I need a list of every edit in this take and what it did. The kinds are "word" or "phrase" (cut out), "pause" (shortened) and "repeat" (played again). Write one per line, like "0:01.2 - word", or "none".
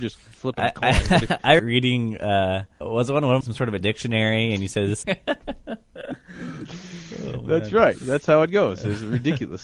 0:01.6 - phrase
0:02.8 - word
0:03.4 - word
0:03.8 - phrase
0:05.0 - phrase